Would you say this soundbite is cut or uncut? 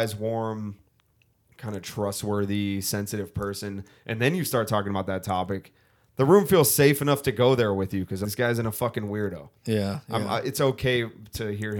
cut